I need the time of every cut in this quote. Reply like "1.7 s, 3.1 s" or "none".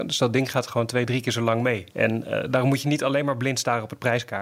1.9 s